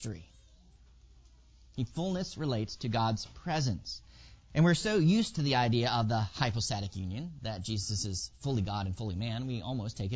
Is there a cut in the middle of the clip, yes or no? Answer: yes